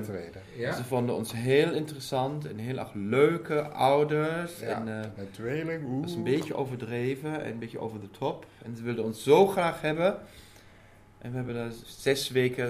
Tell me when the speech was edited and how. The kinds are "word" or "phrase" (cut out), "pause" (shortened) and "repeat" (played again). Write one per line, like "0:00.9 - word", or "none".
none